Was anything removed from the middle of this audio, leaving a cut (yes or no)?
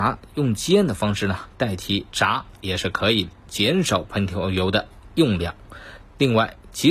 yes